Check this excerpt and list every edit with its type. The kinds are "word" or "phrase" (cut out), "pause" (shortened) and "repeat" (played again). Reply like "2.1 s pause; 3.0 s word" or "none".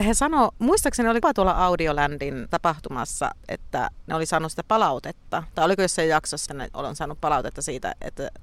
2.5 s word; 6.5 s word